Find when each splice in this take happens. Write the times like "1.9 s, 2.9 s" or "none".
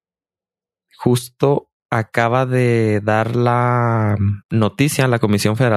4.4 s